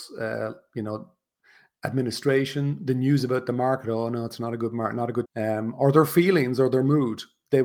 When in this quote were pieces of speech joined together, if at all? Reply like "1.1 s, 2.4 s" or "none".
5.3 s

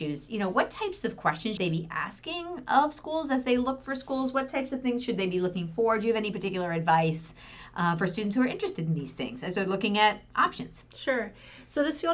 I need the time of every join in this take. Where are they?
1.6 s

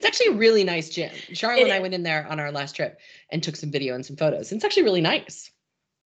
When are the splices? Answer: none

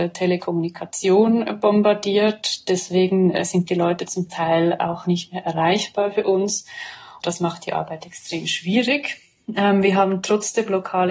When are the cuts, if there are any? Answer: none

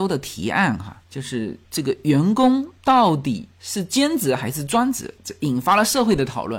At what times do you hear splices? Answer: 2.8 s

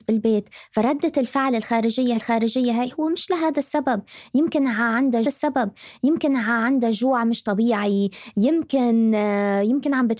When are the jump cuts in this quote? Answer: 2.1 s, 5.2 s

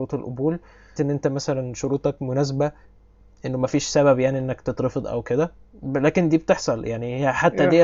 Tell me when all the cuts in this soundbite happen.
1.0 s

